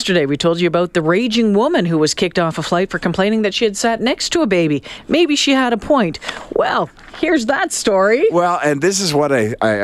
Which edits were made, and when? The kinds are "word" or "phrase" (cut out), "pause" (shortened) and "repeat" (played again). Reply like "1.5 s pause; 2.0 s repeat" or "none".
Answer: none